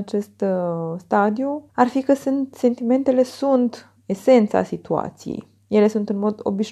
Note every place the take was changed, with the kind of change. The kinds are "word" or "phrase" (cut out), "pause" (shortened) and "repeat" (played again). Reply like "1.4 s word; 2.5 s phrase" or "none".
1.7 s pause